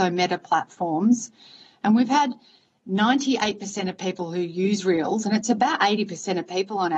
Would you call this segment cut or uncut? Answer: uncut